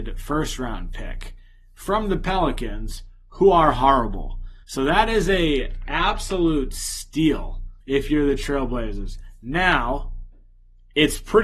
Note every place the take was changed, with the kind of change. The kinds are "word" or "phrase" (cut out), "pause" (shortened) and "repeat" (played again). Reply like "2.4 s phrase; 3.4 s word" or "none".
4.6 s pause; 7.8 s pause